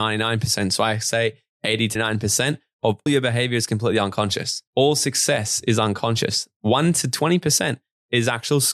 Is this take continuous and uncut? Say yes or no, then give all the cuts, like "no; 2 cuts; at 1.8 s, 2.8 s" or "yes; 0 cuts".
no; 3 cuts; at 2.0 s, 3.1 s, 4.7 s